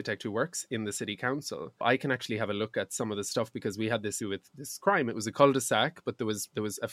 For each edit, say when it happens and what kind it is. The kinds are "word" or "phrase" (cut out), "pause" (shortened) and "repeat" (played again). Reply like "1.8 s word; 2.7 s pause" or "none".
1.8 s word; 4.2 s word